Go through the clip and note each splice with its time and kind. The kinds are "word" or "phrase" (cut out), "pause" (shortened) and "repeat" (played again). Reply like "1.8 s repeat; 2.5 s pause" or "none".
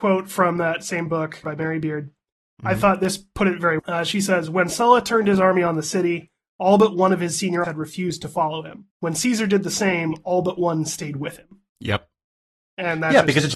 1.4 s phrase; 3.8 s word; 7.6 s word; 8.9 s pause; 11.7 s pause